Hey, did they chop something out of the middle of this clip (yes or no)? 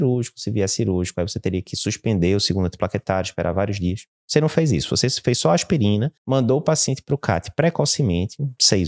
yes